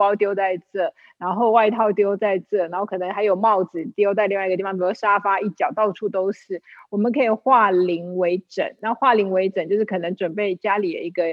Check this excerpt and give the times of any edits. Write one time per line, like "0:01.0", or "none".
none